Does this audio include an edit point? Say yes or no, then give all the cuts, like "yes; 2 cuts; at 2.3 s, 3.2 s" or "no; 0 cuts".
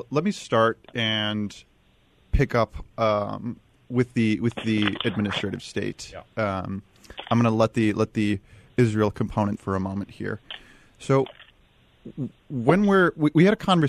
yes; 1 cut; at 9.6 s